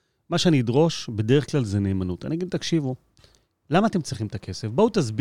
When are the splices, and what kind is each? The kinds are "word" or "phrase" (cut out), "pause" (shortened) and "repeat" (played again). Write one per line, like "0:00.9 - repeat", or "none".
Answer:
none